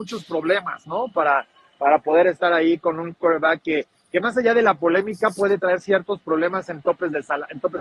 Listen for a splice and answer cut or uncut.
uncut